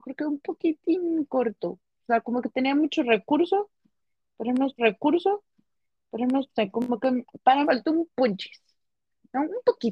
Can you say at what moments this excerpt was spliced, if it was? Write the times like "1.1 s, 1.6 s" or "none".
4.8 s, 7.6 s